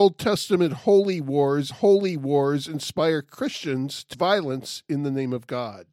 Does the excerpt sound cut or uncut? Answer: cut